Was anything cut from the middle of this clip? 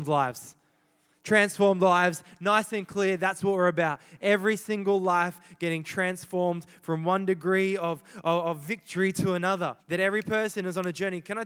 yes; 1 cut; at 9.8 s

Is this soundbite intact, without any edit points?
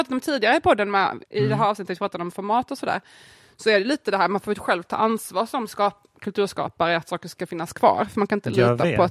yes; 0 cuts

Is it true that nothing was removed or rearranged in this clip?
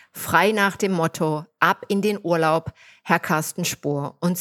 yes; 0 cuts

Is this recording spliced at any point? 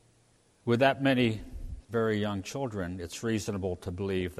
yes; 1 cut; at 1.8 s

